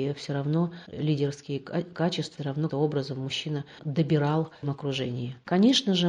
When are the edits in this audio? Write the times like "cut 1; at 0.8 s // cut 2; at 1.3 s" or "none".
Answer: cut 1; at 0.9 s // cut 2; at 2.4 s // cut 3; at 2.7 s // cut 4; at 3.8 s // cut 5; at 4.6 s